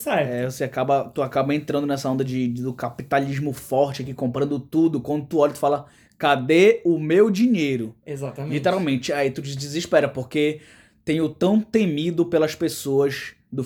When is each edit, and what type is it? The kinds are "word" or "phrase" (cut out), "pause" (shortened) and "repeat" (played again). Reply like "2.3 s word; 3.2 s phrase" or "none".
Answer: none